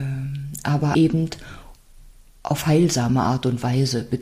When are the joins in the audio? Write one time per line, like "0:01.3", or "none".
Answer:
0:00.9